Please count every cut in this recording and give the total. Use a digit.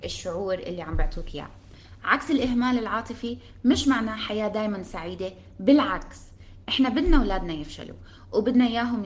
0